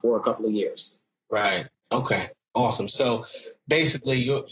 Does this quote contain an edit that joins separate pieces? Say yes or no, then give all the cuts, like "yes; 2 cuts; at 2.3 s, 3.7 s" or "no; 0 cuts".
yes; 1 cut; at 1.8 s